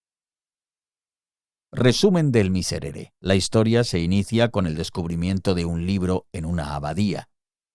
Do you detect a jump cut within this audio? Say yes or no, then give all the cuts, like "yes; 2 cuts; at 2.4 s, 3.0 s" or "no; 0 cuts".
yes; 1 cut; at 3.2 s